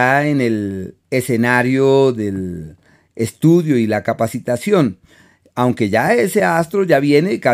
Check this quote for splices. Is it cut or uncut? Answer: uncut